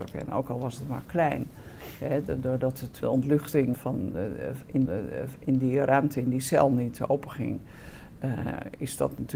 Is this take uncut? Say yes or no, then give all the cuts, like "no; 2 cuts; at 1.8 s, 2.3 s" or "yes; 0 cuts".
no; 3 cuts; at 3.0 s, 3.7 s, 4.9 s